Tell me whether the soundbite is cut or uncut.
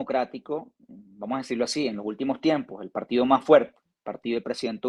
uncut